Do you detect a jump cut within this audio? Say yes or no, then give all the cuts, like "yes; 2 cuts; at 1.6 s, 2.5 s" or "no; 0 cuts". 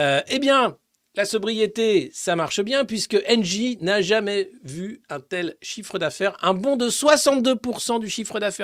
no; 0 cuts